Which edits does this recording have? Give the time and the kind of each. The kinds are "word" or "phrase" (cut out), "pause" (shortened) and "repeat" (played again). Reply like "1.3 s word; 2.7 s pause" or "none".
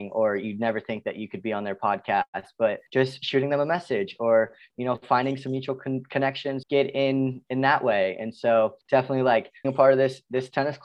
2.9 s pause; 6.6 s phrase; 8.8 s pause; 9.6 s word